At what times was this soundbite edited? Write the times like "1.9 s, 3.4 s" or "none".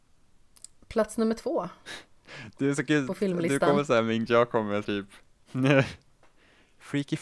4.3 s, 4.8 s